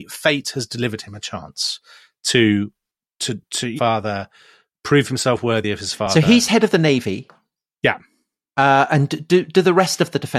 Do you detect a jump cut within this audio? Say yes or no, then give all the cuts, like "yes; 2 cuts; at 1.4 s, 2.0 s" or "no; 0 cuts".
yes; 1 cut; at 3.8 s